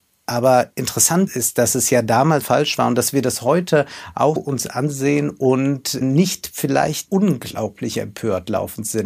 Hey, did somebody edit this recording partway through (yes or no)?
yes